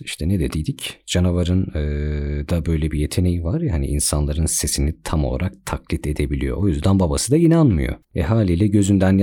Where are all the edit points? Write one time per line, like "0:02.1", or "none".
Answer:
0:08.0